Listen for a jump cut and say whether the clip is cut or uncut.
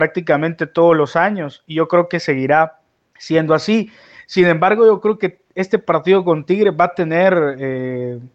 uncut